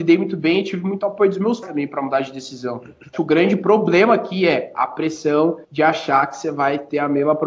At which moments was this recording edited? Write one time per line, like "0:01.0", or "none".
0:01.6
0:03.1
0:05.6